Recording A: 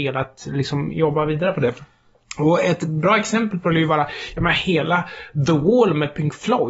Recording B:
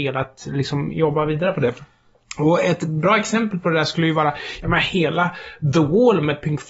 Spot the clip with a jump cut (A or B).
A